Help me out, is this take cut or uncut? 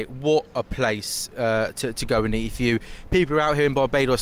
uncut